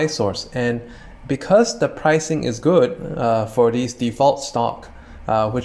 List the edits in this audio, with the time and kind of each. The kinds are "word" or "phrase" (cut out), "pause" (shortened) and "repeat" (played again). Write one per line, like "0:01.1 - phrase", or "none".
none